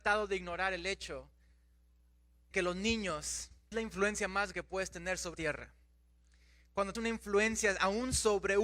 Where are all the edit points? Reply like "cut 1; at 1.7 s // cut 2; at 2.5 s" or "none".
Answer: cut 1; at 2.5 s // cut 2; at 3.7 s // cut 3; at 4.5 s // cut 4; at 5.3 s // cut 5; at 6.9 s